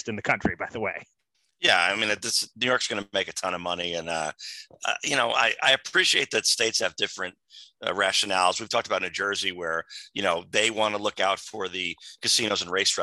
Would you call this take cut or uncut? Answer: uncut